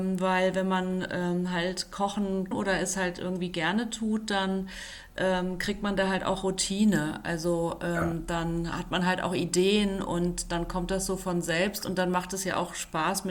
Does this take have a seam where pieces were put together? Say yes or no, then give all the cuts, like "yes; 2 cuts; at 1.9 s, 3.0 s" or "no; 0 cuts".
yes; 1 cut; at 2.5 s